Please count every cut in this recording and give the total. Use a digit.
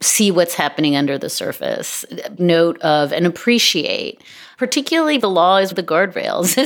3